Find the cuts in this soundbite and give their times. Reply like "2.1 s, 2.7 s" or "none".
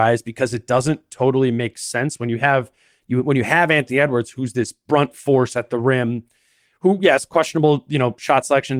none